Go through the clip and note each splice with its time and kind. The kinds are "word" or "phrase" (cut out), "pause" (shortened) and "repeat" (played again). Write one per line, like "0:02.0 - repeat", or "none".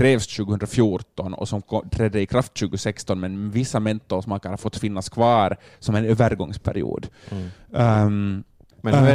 none